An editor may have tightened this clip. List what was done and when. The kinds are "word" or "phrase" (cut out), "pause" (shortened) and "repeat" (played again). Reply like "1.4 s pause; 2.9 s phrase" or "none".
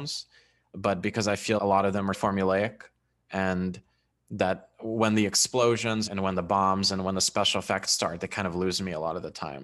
1.6 s word; 2.1 s word; 4.1 s word; 6.1 s word